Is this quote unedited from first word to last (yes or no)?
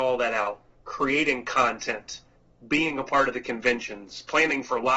yes